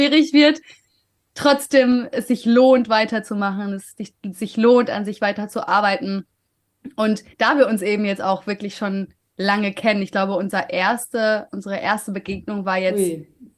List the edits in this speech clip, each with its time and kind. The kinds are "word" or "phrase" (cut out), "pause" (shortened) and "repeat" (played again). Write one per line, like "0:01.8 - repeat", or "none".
0:07.3 - pause